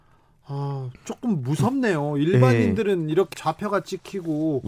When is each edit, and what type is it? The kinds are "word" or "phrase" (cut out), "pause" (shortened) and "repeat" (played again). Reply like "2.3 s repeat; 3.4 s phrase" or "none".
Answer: 1.0 s pause; 3.3 s word